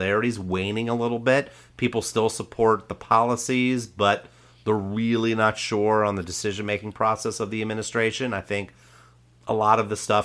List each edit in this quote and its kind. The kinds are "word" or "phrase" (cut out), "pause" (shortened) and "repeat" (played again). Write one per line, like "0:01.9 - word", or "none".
none